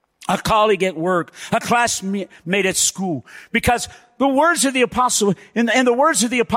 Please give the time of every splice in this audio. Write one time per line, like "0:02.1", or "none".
none